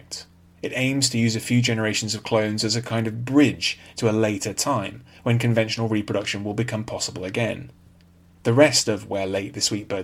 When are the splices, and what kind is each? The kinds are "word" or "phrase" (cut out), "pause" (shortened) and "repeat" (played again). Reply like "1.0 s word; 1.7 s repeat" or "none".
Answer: none